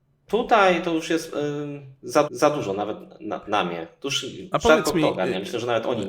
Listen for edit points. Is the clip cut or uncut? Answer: cut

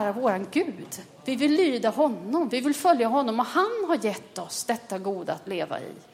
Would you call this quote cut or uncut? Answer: uncut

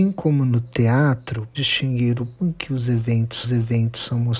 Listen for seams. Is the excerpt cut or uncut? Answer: cut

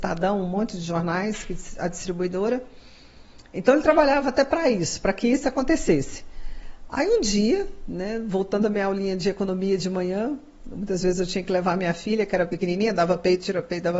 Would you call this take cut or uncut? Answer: uncut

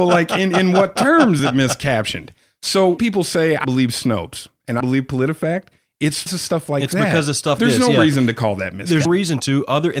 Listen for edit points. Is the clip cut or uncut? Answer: cut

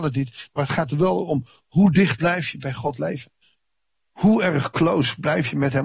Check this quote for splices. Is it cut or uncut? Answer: uncut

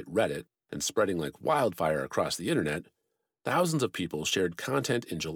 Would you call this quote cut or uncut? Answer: uncut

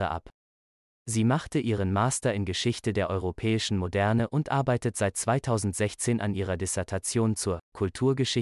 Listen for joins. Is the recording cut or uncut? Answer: uncut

